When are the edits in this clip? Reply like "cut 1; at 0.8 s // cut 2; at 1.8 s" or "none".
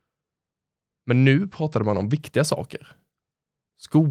none